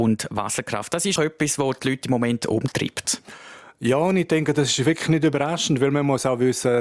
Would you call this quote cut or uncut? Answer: cut